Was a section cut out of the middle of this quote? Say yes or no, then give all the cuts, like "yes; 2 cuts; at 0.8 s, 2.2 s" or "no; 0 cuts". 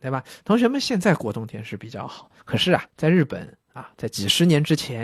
yes; 2 cuts; at 2.4 s, 2.9 s